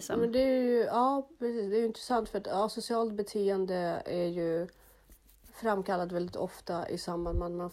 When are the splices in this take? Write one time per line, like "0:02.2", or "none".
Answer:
none